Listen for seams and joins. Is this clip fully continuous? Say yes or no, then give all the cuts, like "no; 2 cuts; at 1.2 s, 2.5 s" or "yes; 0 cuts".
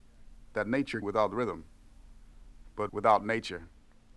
no; 2 cuts; at 1.0 s, 2.9 s